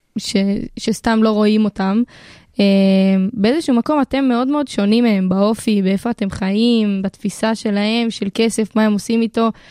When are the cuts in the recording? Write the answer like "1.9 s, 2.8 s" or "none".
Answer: none